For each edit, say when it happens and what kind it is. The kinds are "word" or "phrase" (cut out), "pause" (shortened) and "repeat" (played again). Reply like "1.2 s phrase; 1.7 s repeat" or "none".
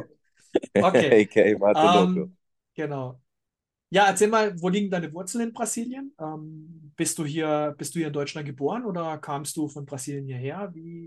none